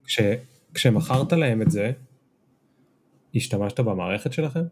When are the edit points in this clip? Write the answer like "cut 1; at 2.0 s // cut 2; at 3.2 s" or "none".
none